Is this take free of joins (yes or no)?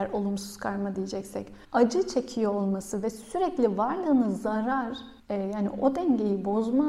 no